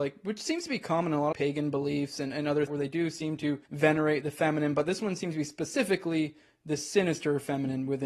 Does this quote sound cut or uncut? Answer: cut